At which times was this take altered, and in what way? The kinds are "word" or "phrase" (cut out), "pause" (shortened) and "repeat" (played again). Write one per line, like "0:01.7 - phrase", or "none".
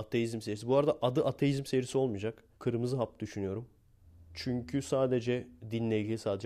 0:02.5 - pause

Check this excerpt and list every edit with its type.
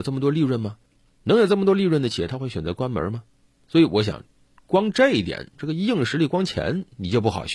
none

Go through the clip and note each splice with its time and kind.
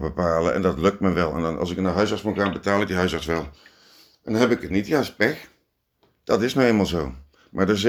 none

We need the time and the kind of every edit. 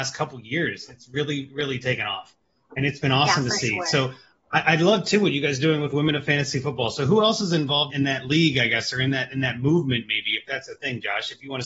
0:07.9 - word

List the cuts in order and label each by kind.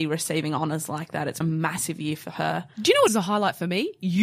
0:01.4 - word
0:03.1 - word

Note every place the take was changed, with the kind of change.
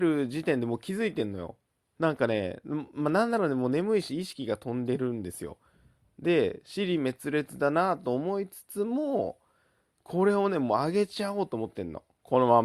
0:01.7 - pause

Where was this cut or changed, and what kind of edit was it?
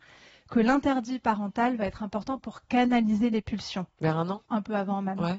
0:04.5 - pause

